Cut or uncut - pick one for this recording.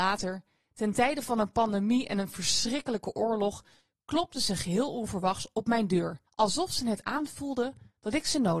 cut